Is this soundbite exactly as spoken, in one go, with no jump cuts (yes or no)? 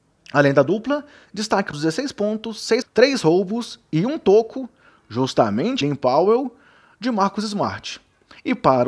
no